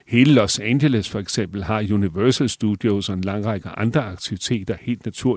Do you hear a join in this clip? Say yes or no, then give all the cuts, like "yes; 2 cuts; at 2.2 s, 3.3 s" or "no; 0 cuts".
no; 0 cuts